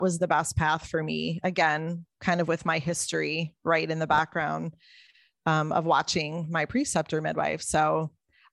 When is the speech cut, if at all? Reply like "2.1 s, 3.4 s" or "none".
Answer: none